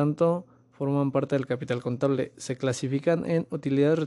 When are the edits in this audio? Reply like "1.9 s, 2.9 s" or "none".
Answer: none